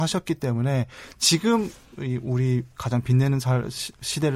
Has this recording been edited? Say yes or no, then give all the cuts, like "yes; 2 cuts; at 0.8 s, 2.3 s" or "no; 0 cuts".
no; 0 cuts